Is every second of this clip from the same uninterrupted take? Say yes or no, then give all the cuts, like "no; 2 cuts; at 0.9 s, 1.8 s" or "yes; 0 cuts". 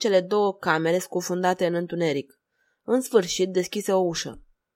yes; 0 cuts